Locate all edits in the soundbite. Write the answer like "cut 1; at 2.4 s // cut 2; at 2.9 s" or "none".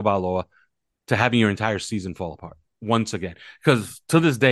none